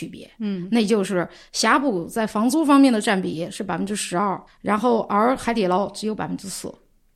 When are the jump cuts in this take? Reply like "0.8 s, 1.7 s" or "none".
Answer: 4.5 s